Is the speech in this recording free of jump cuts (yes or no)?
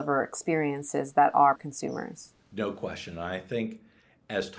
no